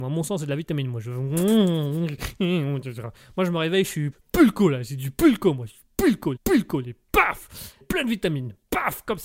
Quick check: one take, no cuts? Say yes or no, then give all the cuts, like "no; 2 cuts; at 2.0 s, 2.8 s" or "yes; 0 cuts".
no; 3 cuts; at 4.1 s, 6.4 s, 7.8 s